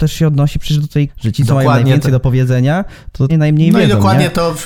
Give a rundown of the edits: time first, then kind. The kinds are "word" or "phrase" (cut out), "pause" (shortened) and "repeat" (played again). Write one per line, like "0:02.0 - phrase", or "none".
0:01.1 - phrase
0:03.3 - word

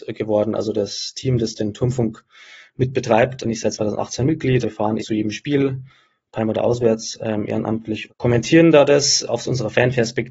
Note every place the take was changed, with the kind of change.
0:03.4 - word
0:04.6 - word
0:05.0 - word
0:08.1 - word

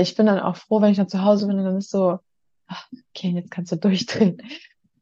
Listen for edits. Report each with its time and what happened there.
none

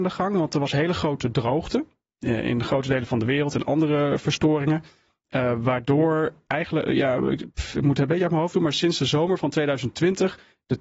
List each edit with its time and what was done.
none

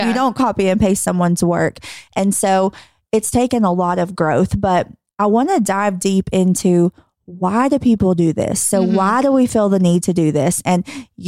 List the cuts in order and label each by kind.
none

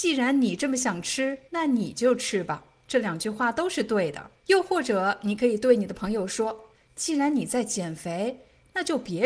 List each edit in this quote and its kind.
0:01.5 - pause
0:04.4 - pause
0:06.7 - pause

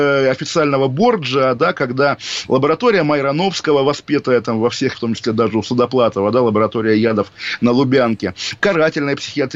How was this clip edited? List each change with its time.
0:04.9 - word
0:08.6 - word

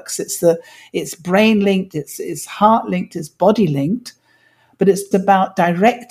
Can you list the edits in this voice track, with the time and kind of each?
0:05.1 - word

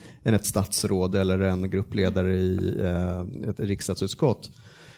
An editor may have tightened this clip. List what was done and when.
none

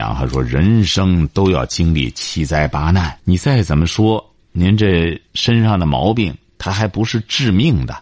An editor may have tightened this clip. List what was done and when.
0:03.2 - pause
0:04.4 - pause
0:05.3 - pause

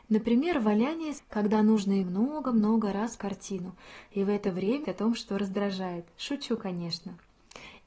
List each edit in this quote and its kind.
0:01.2 - word
0:02.0 - word
0:03.2 - word
0:04.8 - word

